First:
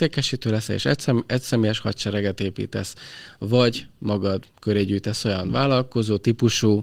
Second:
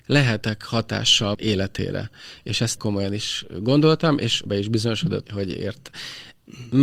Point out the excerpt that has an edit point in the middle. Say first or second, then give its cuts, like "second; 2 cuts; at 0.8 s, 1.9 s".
second; 4 cuts; at 1.3 s, 2.8 s, 4.5 s, 5.2 s